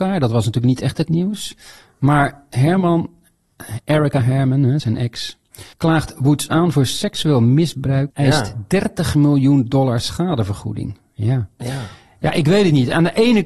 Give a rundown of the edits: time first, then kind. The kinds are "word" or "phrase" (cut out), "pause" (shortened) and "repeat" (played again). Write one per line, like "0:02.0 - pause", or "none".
0:04.8 - word
0:05.7 - pause
0:08.1 - word